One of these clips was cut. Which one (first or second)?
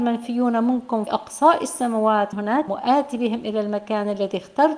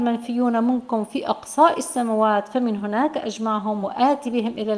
first